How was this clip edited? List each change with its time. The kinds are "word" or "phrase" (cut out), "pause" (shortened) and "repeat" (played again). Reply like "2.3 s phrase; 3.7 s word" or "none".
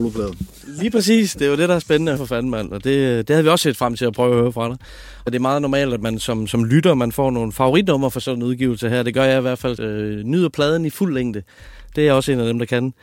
2.2 s word; 5.3 s phrase; 9.8 s phrase